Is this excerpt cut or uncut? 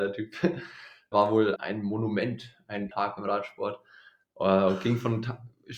cut